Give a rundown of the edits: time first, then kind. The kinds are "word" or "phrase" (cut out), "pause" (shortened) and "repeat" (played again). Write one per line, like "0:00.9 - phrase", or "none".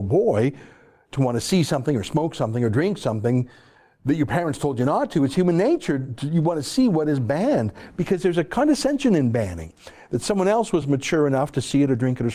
none